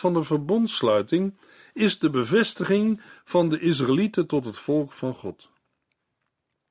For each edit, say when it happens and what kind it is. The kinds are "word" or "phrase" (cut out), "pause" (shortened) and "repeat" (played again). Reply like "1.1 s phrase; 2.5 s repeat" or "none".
none

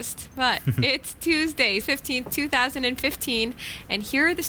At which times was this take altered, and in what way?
1.8 s word

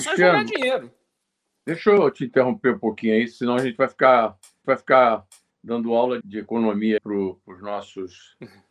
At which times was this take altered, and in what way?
4.6 s repeat; 6.2 s word; 7.0 s word

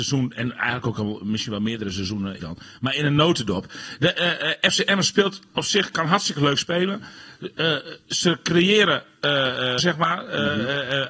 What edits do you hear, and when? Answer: 2.4 s phrase; 9.8 s phrase

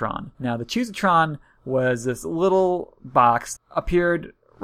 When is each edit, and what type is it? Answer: 3.6 s word

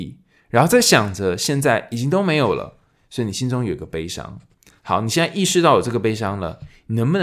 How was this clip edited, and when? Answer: none

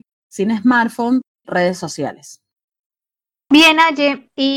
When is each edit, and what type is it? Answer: 1.4 s word

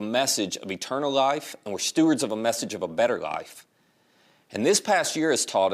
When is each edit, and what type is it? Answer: none

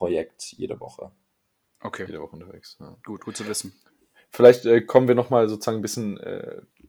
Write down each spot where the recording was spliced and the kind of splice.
none

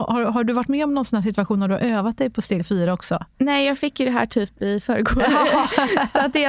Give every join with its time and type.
none

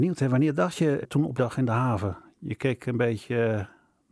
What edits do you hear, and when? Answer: 1.0 s word; 1.4 s phrase

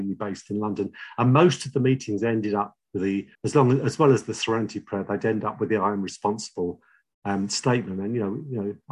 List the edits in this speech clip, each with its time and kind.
3.3 s pause

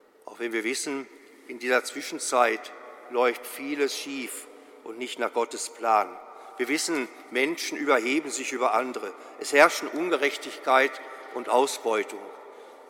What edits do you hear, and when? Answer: none

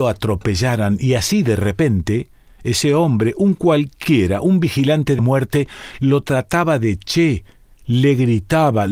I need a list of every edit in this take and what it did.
5.2 s word

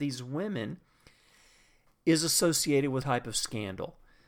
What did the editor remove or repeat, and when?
3.0 s word

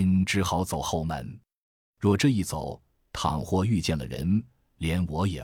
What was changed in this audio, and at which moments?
none

